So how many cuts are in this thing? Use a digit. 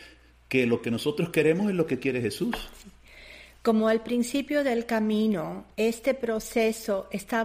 1